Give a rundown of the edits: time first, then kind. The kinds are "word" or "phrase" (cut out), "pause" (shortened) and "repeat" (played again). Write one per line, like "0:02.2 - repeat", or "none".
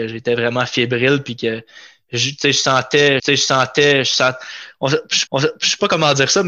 0:03.2 - repeat
0:05.3 - repeat